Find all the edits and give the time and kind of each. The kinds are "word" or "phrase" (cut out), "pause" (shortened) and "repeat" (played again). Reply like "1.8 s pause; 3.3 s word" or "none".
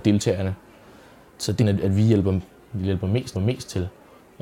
1.6 s phrase; 3.3 s repeat

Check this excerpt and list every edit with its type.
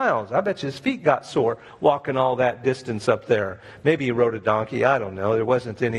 none

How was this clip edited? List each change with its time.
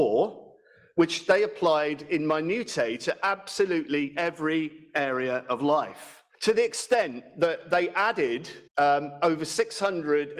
6.3 s pause; 8.7 s pause

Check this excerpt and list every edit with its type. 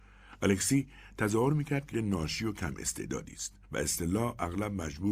1.9 s word; 3.6 s pause

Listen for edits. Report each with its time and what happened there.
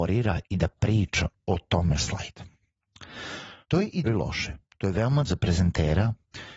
2.0 s phrase; 3.6 s pause; 4.0 s word; 4.7 s pause; 5.2 s word

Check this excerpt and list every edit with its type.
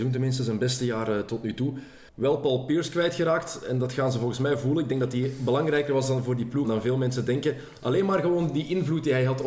2.1 s pause; 6.6 s word

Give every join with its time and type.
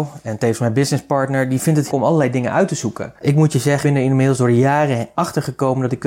1.9 s word; 3.8 s word

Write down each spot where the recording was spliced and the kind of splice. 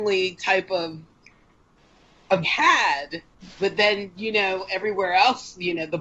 2.4 s phrase

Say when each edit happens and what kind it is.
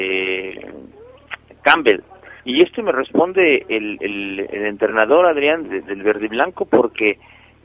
2.4 s pause; 4.0 s word; 5.6 s word

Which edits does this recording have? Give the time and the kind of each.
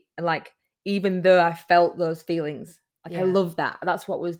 none

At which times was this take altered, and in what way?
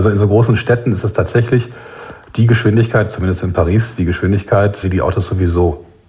4.8 s word

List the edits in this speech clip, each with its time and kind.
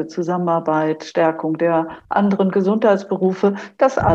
none

